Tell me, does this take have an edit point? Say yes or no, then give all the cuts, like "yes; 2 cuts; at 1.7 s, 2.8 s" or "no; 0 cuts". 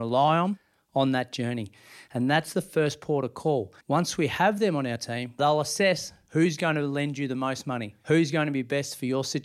yes; 1 cut; at 3.8 s